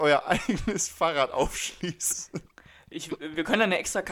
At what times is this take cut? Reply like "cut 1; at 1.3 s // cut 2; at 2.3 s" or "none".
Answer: none